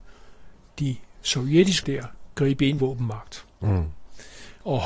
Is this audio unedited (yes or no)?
no